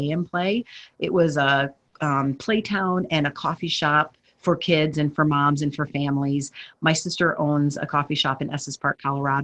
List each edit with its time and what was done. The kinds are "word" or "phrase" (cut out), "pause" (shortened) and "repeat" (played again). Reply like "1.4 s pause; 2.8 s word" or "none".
none